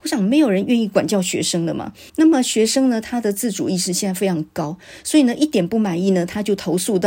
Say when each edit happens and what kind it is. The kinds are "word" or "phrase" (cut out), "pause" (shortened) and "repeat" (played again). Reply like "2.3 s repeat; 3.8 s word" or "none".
2.1 s pause